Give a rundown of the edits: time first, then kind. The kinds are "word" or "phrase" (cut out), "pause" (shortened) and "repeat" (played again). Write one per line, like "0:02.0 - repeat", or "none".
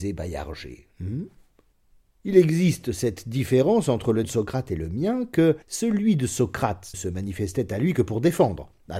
0:01.7 - pause
0:04.2 - word
0:05.6 - pause
0:06.9 - word